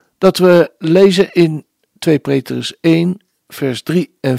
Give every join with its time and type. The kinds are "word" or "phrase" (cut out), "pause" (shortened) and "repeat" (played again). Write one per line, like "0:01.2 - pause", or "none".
none